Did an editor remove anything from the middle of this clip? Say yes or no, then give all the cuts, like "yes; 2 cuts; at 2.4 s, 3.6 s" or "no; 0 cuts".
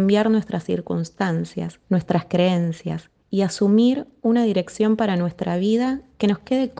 yes; 2 cuts; at 1.8 s, 3.2 s